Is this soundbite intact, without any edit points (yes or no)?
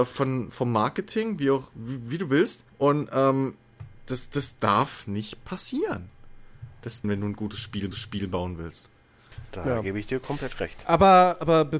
no